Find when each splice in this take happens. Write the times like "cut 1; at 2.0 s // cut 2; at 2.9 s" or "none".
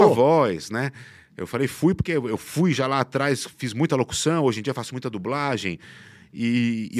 none

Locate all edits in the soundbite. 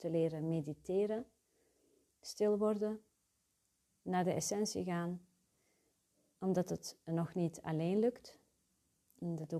none

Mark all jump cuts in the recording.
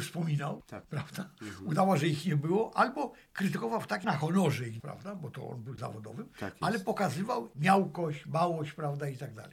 cut 1; at 4.0 s // cut 2; at 4.8 s // cut 3; at 5.8 s // cut 4; at 7.5 s

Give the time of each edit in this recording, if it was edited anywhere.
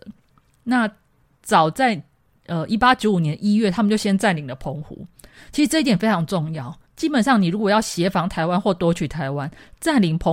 cut 1; at 6.9 s

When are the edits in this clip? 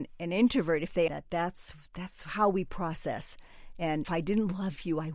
cut 1; at 1.1 s // cut 2; at 4.0 s

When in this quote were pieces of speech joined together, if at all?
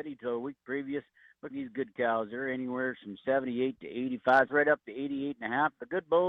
cut 1; at 1.5 s // cut 2; at 4.5 s

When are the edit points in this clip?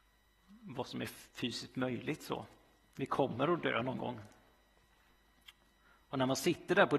cut 1; at 1.3 s

